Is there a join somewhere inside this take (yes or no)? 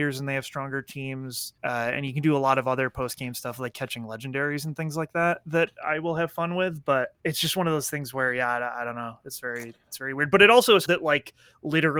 yes